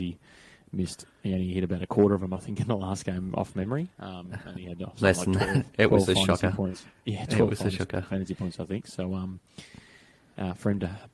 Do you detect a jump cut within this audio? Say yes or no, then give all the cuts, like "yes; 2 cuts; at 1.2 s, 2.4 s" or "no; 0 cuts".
no; 0 cuts